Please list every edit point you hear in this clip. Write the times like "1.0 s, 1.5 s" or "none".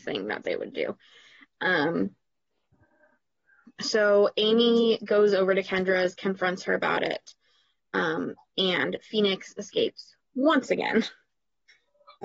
none